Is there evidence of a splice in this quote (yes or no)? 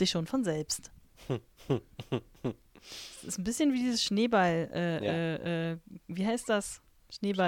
no